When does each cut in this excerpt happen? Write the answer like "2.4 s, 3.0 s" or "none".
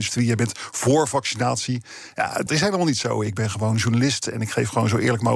2.5 s